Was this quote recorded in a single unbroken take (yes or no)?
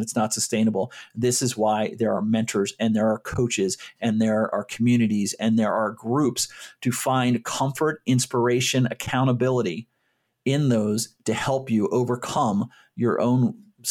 yes